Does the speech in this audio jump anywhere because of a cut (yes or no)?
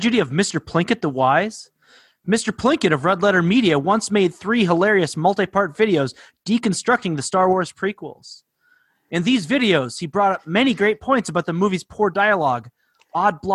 no